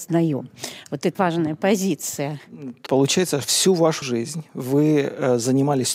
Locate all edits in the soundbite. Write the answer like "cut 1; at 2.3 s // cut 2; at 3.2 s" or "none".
cut 1; at 1.1 s // cut 2; at 2.9 s // cut 3; at 4.0 s